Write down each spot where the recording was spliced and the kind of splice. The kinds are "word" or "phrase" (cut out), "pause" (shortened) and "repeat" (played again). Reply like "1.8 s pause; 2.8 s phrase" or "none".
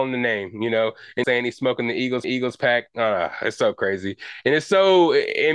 1.2 s phrase; 2.2 s repeat